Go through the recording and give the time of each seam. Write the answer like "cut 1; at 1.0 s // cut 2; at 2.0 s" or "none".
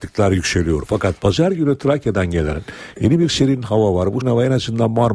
cut 1; at 4.2 s

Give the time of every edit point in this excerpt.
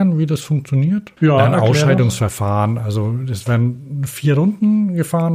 cut 1; at 1.2 s

